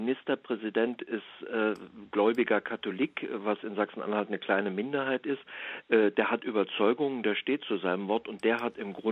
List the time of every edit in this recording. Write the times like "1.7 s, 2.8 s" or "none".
none